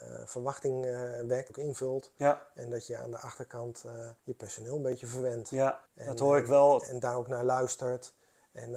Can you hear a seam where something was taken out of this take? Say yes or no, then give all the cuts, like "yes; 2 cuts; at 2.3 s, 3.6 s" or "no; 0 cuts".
yes; 4 cuts; at 1.5 s, 4.2 s, 5.9 s, 6.9 s